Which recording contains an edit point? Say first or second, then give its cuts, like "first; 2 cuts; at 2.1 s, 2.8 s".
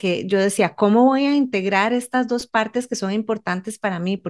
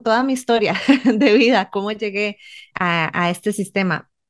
second; 1 cut; at 2.7 s